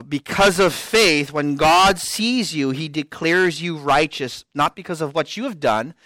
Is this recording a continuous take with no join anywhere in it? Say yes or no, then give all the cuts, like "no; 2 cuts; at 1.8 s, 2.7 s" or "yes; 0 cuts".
yes; 0 cuts